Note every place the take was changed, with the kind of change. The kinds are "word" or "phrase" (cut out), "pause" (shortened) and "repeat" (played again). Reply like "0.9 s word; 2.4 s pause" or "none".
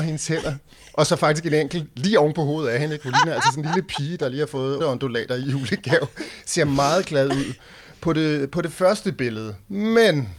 4.8 s word